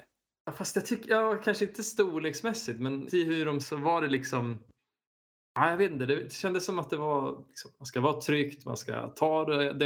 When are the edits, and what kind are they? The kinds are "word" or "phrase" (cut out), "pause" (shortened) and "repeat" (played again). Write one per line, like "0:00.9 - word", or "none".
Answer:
0:03.1 - word
0:03.6 - word